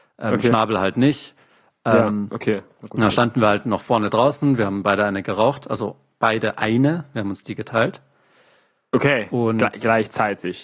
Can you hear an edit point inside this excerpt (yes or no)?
no